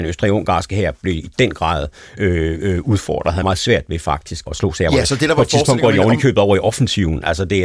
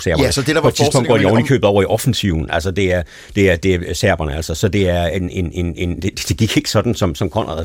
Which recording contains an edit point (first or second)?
first